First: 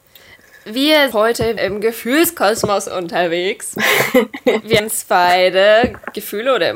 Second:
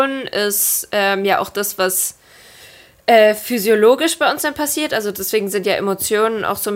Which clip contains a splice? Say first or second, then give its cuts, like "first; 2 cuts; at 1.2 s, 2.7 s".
first; 3 cuts; at 1.1 s, 1.6 s, 4.8 s